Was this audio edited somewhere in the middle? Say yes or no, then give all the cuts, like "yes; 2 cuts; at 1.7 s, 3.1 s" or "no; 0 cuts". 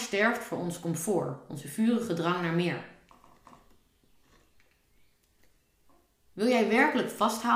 no; 0 cuts